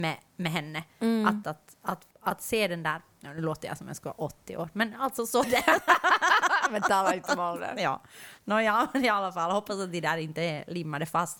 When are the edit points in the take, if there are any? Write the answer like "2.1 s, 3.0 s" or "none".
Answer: 1.4 s, 2.1 s, 5.4 s